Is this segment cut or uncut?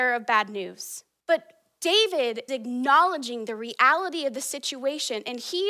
cut